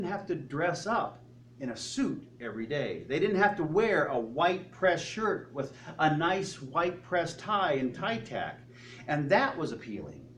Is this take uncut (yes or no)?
yes